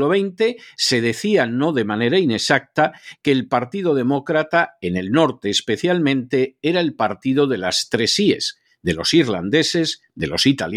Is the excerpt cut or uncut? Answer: uncut